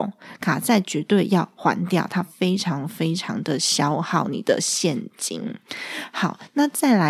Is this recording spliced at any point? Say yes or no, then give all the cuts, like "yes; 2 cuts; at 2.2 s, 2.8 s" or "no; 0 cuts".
no; 0 cuts